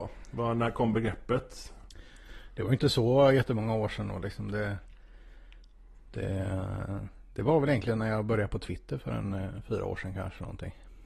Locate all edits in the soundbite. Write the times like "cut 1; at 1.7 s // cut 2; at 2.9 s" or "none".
none